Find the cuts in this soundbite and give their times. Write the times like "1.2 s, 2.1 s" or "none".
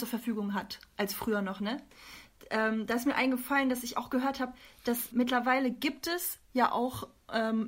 5.1 s